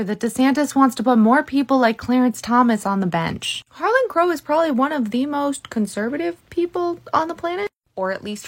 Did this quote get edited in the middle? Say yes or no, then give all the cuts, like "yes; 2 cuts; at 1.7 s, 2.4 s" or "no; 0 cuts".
yes; 1 cut; at 3.7 s